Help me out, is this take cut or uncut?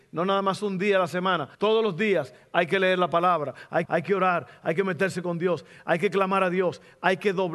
cut